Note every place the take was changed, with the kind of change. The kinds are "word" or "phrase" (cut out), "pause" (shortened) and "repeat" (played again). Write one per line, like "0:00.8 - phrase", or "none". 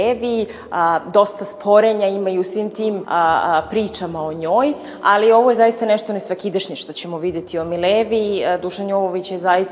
0:03.0 - word